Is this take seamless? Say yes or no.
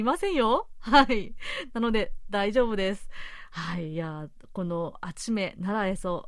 yes